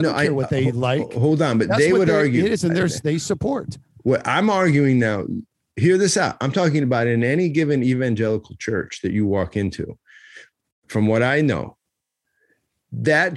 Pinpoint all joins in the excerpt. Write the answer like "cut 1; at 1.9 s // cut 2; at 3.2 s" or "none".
none